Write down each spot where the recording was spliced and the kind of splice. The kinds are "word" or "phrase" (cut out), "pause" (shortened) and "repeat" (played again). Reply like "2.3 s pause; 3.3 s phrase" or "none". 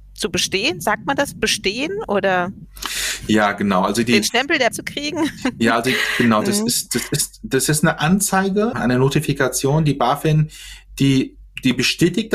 4.7 s word; 8.7 s word